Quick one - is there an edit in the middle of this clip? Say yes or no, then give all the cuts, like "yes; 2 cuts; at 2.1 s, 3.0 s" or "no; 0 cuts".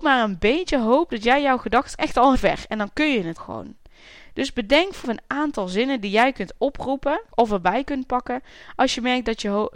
yes; 5 cuts; at 2.0 s, 2.3 s, 3.4 s, 5.0 s, 7.3 s